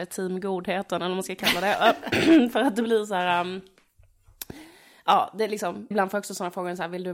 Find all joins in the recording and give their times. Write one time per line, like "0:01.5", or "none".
0:05.9